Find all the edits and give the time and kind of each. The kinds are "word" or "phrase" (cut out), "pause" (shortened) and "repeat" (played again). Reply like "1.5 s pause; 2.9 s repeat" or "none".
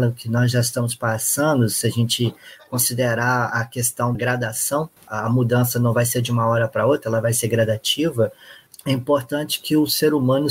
4.1 s word; 5.0 s pause

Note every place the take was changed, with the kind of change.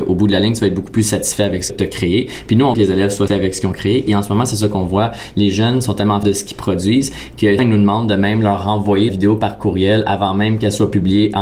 1.7 s word; 2.7 s word; 3.3 s word; 6.2 s word; 7.6 s word; 9.1 s word

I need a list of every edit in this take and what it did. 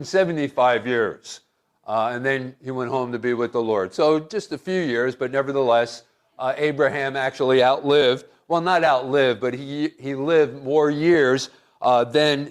none

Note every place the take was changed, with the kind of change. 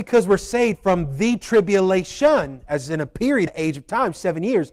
3.5 s word

